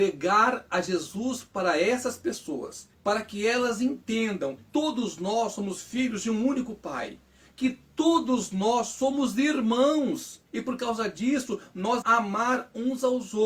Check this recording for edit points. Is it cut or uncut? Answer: cut